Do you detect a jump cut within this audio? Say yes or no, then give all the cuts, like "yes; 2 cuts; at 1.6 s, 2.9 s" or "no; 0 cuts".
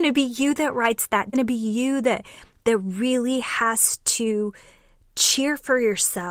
yes; 1 cut; at 1.3 s